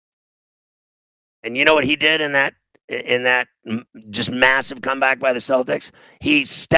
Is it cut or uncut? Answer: uncut